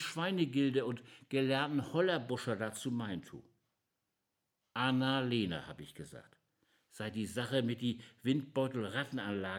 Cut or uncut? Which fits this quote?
uncut